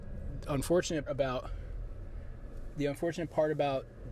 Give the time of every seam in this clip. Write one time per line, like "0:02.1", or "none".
0:01.1

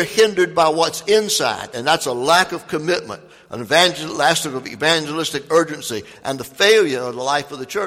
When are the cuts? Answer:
none

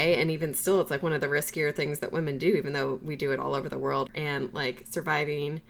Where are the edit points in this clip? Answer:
none

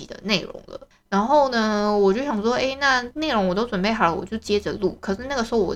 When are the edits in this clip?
0:00.9

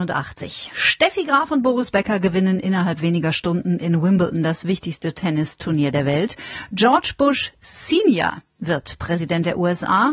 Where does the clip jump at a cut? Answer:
none

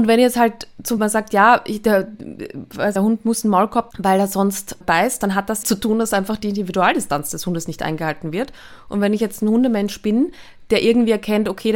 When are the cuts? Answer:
0:01.0
0:03.0
0:03.9
0:04.8
0:05.6

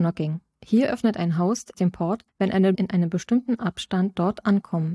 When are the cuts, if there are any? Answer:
0:01.7
0:02.3
0:02.7

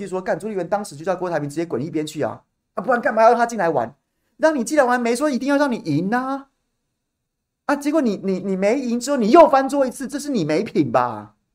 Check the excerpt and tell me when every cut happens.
none

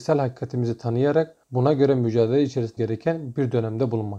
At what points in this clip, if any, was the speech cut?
0:01.4
0:02.8

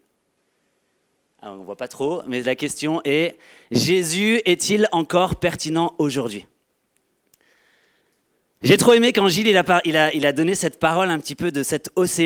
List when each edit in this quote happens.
none

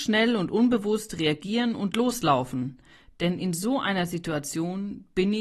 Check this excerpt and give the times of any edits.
none

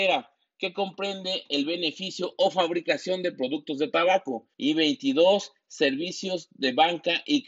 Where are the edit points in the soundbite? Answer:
0:04.5

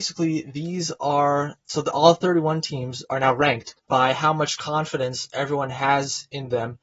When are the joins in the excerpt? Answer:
0:03.8

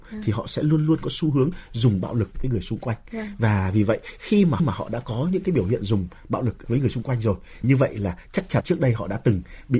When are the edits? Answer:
0:02.3
0:04.6
0:06.6
0:07.6
0:08.6

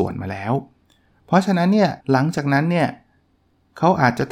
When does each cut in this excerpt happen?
0:02.0

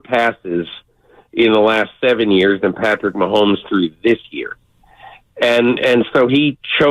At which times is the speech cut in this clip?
none

